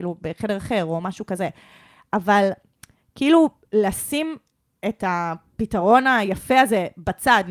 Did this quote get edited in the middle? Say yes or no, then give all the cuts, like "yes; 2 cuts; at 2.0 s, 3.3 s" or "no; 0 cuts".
no; 0 cuts